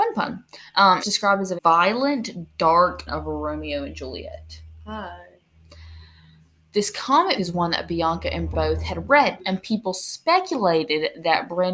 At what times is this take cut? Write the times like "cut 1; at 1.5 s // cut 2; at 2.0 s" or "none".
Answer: cut 1; at 1.0 s // cut 2; at 1.6 s // cut 3; at 3.1 s // cut 4; at 7.4 s // cut 5; at 8.5 s // cut 6; at 9.4 s